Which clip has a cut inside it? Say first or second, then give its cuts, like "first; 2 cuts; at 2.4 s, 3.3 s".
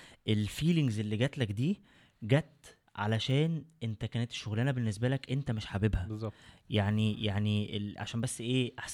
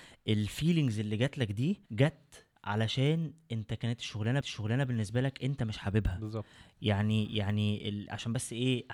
second; 2 cuts; at 1.9 s, 4.4 s